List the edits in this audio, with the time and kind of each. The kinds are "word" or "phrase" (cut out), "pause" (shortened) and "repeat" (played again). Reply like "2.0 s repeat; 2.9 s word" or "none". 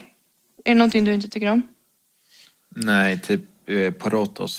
none